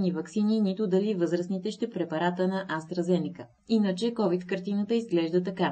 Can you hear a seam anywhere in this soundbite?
yes; 1 cut; at 1.9 s

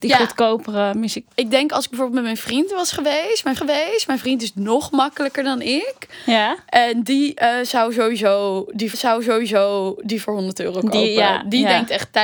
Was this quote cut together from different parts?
yes; 3 cuts; at 1.3 s, 3.6 s, 8.9 s

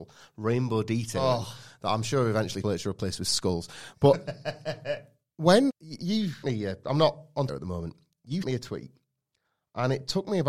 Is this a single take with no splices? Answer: no; 5 cuts; at 2.6 s, 5.7 s, 6.4 s, 7.5 s, 8.4 s

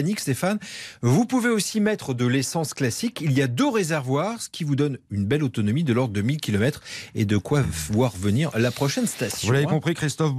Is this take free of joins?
yes; 0 cuts

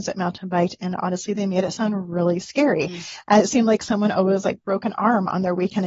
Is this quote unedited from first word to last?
yes; 0 cuts

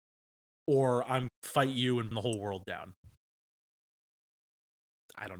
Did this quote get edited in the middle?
yes; 2 cuts; at 1.3 s, 2.1 s

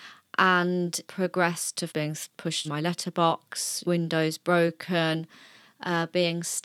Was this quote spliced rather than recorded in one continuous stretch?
yes; 4 cuts; at 1.1 s, 1.9 s, 2.6 s, 3.8 s

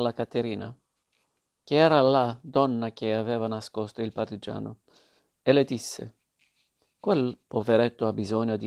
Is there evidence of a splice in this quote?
no; 0 cuts

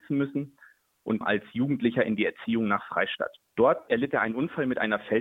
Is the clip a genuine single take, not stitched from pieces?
no; 1 cut; at 1.2 s

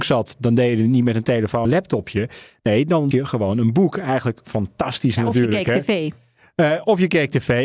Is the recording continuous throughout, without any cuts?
no; 2 cuts; at 1.6 s, 3.1 s

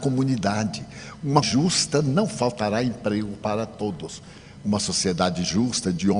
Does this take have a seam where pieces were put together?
yes; 1 cut; at 1.4 s

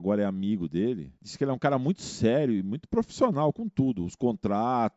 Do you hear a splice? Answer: yes; 1 cut; at 1.2 s

